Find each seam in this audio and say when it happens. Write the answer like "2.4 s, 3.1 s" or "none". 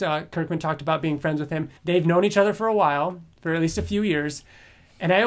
1.8 s